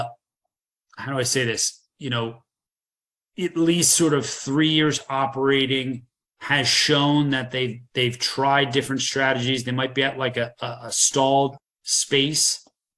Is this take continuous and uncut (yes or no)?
yes